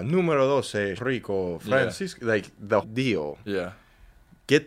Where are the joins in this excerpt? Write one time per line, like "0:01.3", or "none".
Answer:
0:01.0
0:02.8